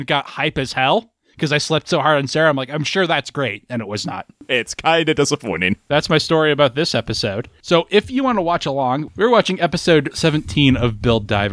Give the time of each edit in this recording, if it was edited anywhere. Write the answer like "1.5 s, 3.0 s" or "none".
none